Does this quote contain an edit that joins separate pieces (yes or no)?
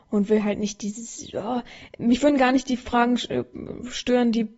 no